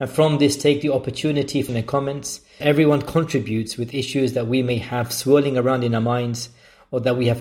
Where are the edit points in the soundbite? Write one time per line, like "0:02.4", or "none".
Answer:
0:01.7
0:02.6